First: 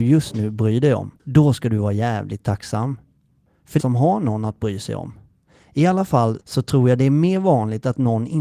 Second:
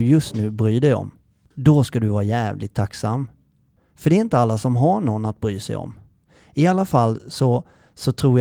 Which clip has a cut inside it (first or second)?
first